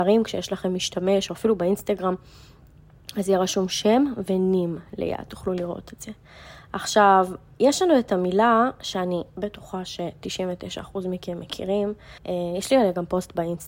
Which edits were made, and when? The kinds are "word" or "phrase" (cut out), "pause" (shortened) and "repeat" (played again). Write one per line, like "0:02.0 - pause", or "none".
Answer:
0:12.2 - pause